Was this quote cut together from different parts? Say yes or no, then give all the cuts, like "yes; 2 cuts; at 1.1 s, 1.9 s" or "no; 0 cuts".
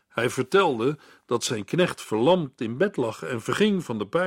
no; 0 cuts